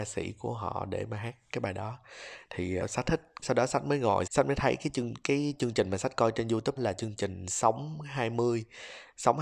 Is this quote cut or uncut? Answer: cut